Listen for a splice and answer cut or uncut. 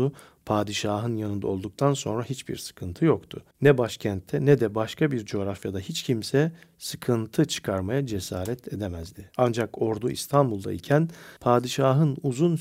cut